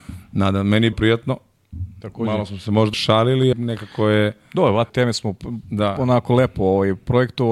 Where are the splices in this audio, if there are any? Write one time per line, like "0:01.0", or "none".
0:00.9
0:02.9
0:03.5
0:04.9